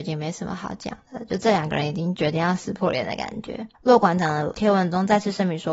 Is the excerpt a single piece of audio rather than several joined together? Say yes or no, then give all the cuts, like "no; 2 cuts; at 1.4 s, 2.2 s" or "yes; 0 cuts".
no; 1 cut; at 3.7 s